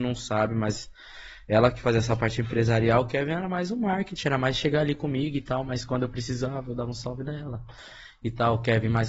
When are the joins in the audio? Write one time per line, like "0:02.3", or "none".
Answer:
none